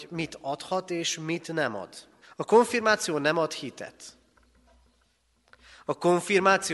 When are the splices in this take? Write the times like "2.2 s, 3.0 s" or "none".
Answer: 2.2 s